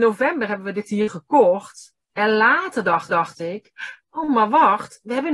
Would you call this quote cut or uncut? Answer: cut